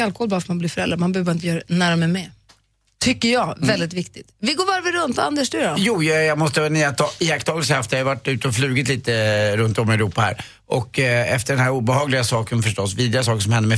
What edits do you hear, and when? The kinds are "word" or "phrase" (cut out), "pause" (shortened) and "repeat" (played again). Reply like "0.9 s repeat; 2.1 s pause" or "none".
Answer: none